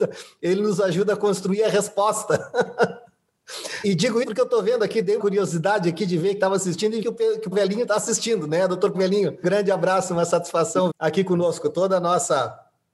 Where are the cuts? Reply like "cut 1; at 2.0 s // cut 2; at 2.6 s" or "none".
cut 1; at 3.8 s // cut 2; at 4.2 s // cut 3; at 5.2 s // cut 4; at 6.4 s // cut 5; at 7.0 s // cut 6; at 7.5 s // cut 7; at 8.9 s // cut 8; at 9.4 s // cut 9; at 10.9 s